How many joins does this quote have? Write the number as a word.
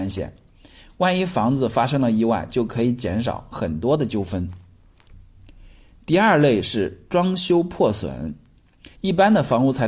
one